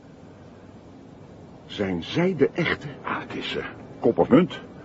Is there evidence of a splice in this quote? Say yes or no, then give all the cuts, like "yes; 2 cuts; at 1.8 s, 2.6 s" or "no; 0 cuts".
no; 0 cuts